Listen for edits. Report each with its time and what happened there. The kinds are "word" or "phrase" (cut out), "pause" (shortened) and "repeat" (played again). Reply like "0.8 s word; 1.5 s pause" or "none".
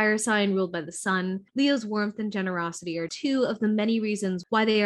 1.5 s pause; 3.1 s word